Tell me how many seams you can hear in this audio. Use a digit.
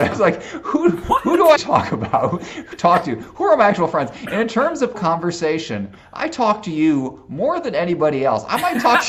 2